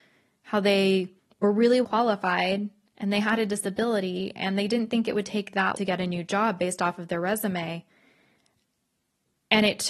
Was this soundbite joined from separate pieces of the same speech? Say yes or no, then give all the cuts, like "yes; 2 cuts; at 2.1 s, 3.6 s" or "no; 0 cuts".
yes; 3 cuts; at 1.2 s, 1.8 s, 5.8 s